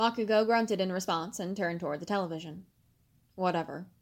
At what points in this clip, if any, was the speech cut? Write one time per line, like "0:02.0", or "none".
none

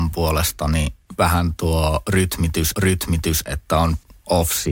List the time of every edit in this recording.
0:01.6
0:02.7

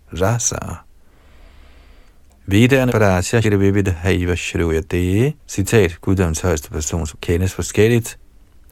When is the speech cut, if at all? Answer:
0:02.9
0:03.4
0:05.4
0:07.1

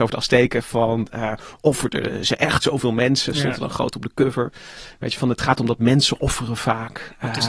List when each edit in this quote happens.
none

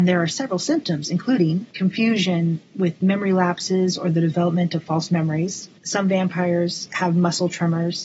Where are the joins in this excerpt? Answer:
0:05.8

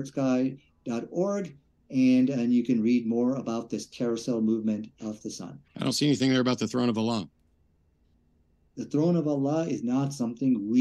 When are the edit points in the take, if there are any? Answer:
0:05.7

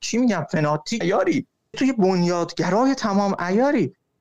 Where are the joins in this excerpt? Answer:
0:01.0
0:01.7

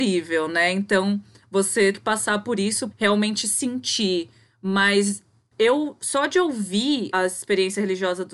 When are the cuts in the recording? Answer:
0:01.9
0:02.9
0:05.5
0:07.1

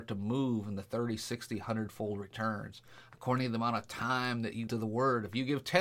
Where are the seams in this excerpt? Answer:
0:04.7

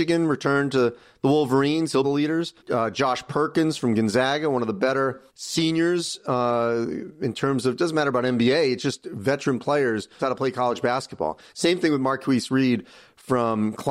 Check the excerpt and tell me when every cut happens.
0:02.0
0:02.6
0:05.3
0:10.2

